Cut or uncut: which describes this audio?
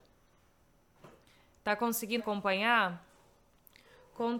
cut